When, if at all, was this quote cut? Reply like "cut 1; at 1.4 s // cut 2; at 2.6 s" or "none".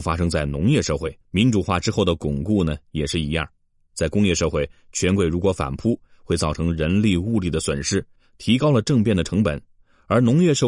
cut 1; at 1.2 s